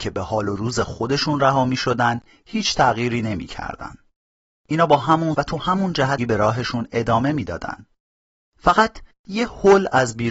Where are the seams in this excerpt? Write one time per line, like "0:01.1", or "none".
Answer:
0:05.3
0:06.2